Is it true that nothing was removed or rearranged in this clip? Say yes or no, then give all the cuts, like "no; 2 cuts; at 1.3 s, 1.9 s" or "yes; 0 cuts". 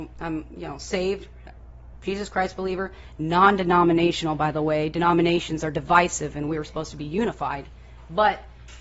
yes; 0 cuts